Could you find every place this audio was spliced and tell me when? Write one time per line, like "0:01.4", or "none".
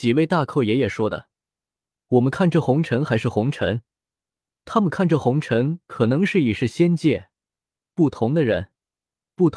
none